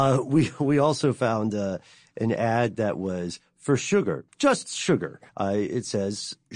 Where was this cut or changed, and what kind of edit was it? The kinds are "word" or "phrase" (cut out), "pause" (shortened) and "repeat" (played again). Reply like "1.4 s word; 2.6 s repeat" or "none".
4.3 s pause; 5.3 s pause